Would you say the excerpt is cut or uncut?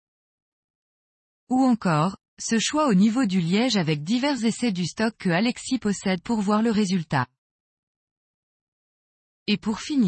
uncut